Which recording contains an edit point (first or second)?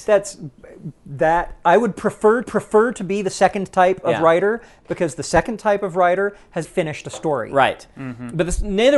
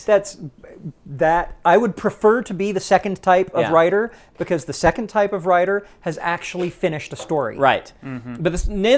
first